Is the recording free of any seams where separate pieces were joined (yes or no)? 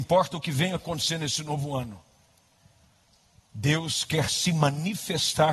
yes